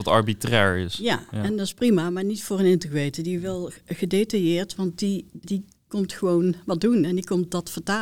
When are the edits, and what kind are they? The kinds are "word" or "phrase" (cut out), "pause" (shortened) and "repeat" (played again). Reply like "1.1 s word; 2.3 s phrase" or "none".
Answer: 5.4 s word

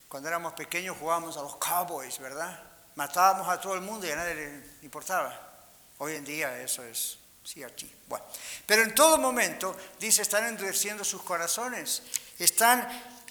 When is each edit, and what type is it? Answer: none

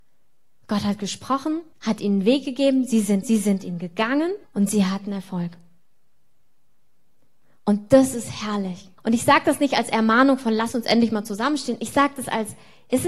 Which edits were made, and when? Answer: 1.7 s pause; 3.2 s repeat; 4.4 s pause; 9.0 s pause

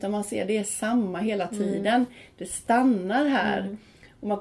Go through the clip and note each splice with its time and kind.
none

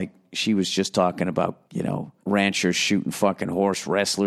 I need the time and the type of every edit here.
1.7 s pause; 2.2 s pause

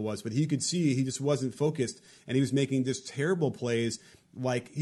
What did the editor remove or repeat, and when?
none

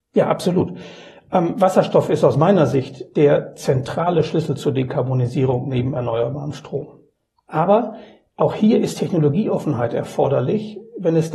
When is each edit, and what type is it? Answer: none

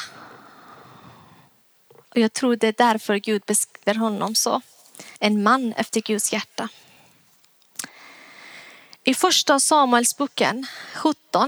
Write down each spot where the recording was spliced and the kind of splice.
3.9 s word; 5.2 s pause

